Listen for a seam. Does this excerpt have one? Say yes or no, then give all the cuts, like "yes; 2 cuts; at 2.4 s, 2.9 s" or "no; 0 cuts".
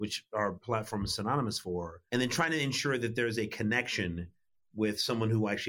yes; 1 cut; at 2.1 s